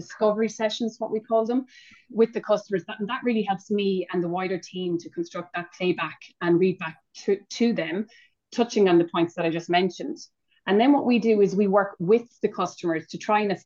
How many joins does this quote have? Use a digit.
0